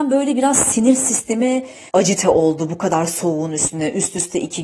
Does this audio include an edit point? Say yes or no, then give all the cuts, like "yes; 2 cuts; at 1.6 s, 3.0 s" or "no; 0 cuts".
yes; 1 cut; at 1.9 s